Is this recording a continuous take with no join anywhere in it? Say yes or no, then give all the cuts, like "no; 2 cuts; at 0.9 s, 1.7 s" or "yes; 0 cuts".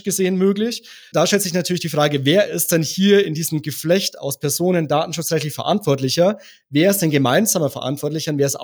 yes; 0 cuts